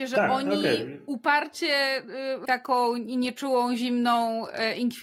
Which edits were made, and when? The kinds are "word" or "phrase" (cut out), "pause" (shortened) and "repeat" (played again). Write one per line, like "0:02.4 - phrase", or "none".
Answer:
0:02.4 - phrase

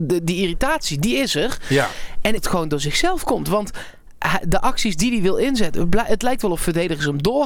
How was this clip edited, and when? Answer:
0:02.4 - phrase

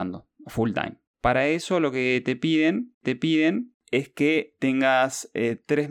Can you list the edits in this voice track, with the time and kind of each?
0:03.0 - repeat
0:04.6 - word

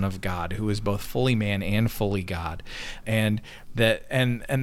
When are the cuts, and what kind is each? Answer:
0:03.0 - word

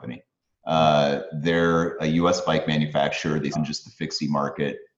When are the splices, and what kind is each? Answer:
0:02.0 - word
0:03.5 - phrase

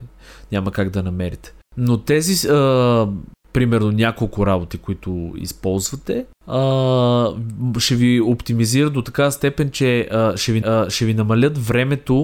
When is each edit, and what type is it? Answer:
0:10.6 - repeat

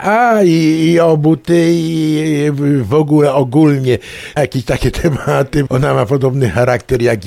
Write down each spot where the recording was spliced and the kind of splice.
0:04.4 - word
0:05.7 - word

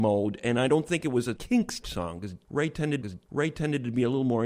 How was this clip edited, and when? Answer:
0:01.4 - word
0:01.8 - word
0:03.0 - repeat

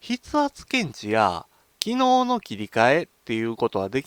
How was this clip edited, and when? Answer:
none

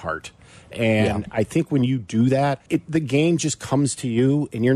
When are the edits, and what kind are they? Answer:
0:02.7 - pause

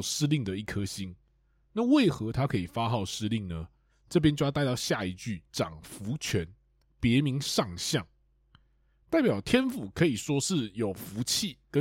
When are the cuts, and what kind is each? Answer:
0:05.5 - pause

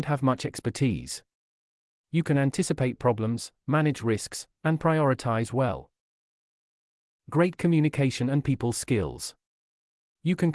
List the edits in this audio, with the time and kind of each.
none

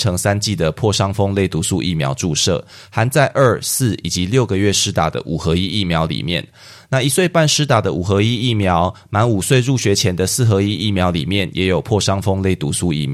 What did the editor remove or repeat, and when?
none

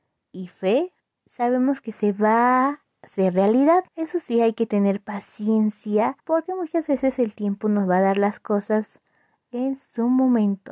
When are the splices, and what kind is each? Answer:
0:01.0 - pause
0:03.9 - pause
0:06.2 - pause

